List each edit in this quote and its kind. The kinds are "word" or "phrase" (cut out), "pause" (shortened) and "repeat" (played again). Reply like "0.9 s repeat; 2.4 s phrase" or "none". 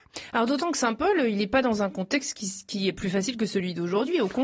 none

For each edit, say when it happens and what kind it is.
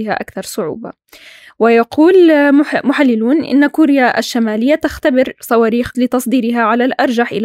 5.9 s word

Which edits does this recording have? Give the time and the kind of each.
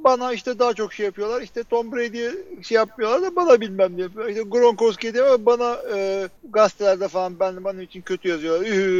6.4 s pause

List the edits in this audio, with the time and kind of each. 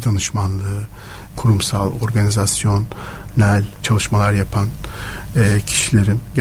1.3 s phrase; 3.8 s phrase

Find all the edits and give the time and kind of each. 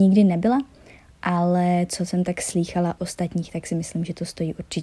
3.0 s word

